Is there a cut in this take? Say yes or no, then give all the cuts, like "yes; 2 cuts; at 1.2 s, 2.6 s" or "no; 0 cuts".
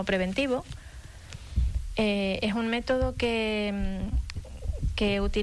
no; 0 cuts